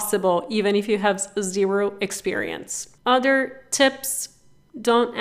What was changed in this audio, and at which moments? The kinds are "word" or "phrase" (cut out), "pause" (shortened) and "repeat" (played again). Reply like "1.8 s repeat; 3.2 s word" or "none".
3.0 s pause